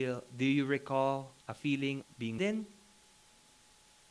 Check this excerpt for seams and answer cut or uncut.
cut